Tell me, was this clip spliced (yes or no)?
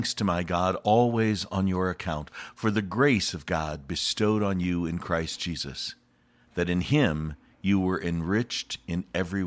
no